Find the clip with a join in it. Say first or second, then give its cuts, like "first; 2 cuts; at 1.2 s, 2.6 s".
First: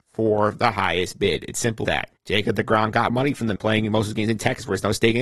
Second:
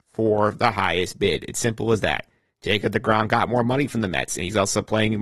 first; 4 cuts; at 1.8 s, 2.2 s, 3.1 s, 3.6 s